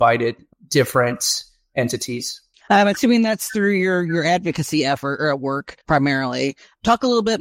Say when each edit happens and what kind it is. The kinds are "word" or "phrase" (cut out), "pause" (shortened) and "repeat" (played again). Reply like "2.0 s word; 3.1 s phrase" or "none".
2.5 s pause; 5.8 s pause